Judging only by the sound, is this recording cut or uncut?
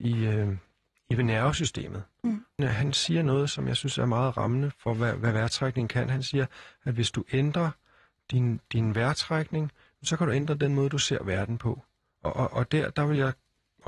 cut